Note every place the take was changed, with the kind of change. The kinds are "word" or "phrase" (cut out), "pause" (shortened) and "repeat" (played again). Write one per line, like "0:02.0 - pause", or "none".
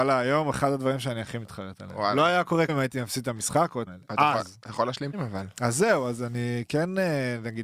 0:02.7 - word
0:03.9 - word
0:05.1 - word